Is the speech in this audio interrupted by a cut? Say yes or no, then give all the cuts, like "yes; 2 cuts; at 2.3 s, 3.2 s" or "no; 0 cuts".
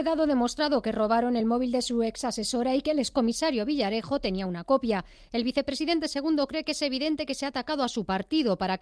no; 0 cuts